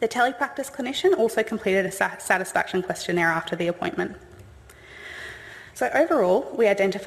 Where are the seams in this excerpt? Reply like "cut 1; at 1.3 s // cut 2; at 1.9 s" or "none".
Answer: none

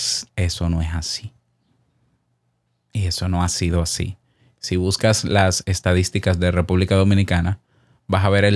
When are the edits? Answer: none

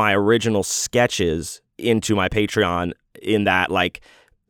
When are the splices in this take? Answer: cut 1; at 1.7 s

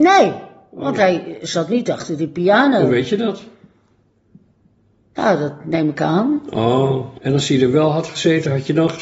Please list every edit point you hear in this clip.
none

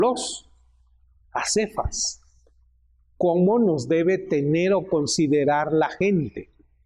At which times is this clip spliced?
none

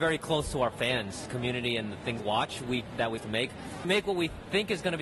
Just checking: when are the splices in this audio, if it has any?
cut 1; at 1.3 s // cut 2; at 2.2 s // cut 3; at 3.2 s // cut 4; at 3.8 s

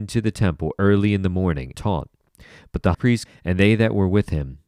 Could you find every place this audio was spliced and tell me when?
cut 1; at 1.7 s // cut 2; at 2.9 s // cut 3; at 3.3 s

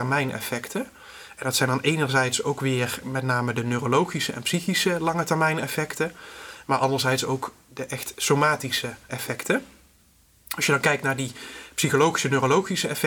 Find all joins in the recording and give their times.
cut 1; at 9.1 s

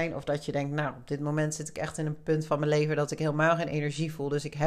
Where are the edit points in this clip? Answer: none

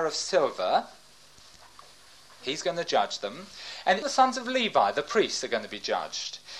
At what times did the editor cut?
cut 1; at 4.0 s

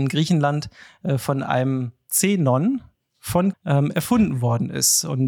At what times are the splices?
cut 1; at 3.5 s

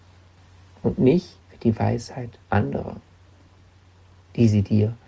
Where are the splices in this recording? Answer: cut 1; at 1.4 s // cut 2; at 2.4 s

